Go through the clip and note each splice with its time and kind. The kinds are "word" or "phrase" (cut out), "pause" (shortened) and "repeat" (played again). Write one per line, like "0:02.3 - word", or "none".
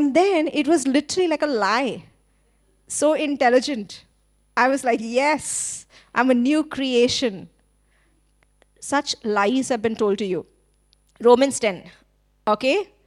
none